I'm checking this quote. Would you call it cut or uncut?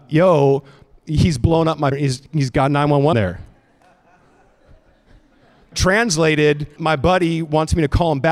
cut